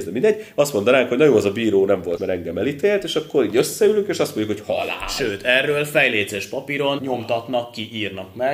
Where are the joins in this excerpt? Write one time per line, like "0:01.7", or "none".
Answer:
0:02.2
0:07.0